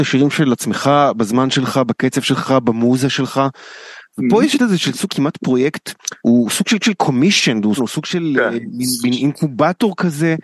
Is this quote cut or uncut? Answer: cut